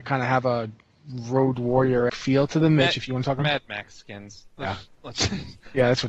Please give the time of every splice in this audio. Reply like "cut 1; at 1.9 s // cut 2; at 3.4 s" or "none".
cut 1; at 2.1 s // cut 2; at 3.4 s